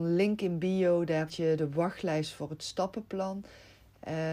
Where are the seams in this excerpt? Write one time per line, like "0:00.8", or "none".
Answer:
0:01.3